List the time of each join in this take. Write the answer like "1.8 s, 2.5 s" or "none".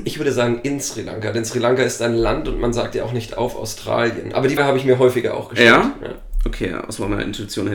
4.6 s